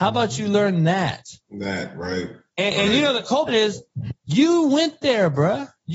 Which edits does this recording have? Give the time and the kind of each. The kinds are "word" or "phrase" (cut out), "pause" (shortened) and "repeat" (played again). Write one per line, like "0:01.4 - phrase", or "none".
0:03.5 - phrase
0:04.2 - pause